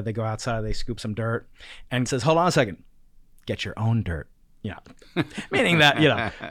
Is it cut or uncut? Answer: cut